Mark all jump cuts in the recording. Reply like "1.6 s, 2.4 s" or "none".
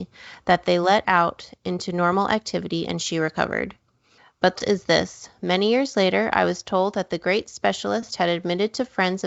1.0 s, 4.6 s